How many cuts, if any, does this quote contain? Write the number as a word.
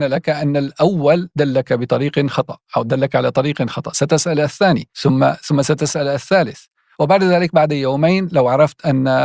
one